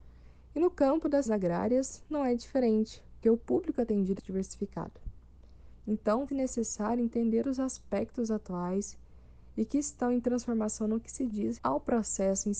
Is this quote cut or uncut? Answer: cut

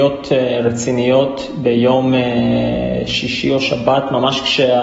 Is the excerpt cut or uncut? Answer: uncut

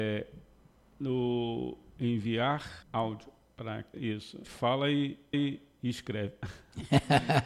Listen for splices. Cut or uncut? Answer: cut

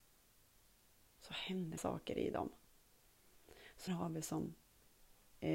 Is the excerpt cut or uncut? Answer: cut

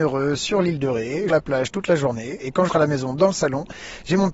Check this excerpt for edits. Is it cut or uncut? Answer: cut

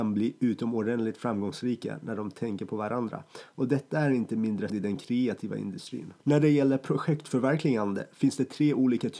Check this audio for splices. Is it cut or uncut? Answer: cut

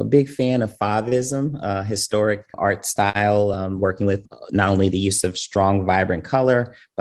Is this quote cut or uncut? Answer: uncut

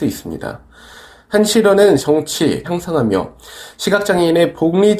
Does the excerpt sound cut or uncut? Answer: cut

